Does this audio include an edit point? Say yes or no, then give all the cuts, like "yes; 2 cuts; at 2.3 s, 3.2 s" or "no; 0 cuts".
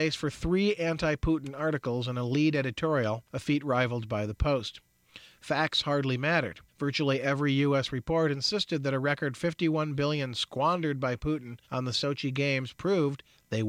yes; 3 cuts; at 3.3 s, 6.7 s, 11.6 s